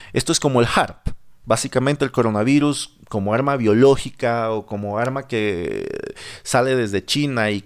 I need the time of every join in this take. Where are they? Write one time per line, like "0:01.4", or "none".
0:03.0